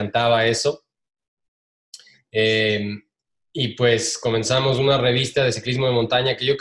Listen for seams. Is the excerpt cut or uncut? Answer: uncut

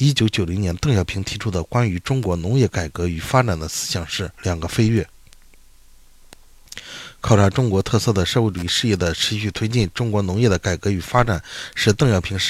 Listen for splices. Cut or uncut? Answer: cut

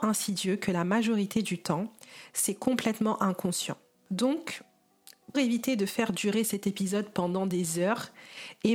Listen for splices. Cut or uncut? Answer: cut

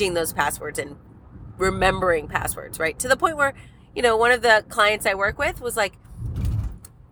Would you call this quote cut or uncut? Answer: uncut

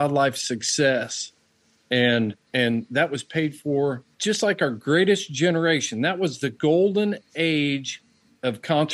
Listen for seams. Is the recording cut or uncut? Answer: cut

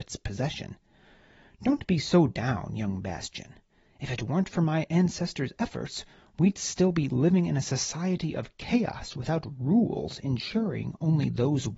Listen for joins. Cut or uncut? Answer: uncut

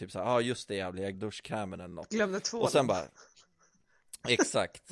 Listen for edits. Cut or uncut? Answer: cut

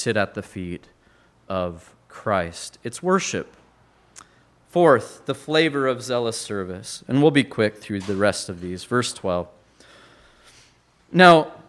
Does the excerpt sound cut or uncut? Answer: uncut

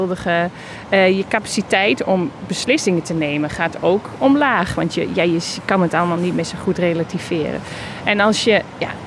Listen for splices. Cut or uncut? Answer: uncut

